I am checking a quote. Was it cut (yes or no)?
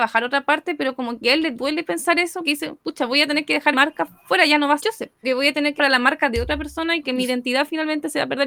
yes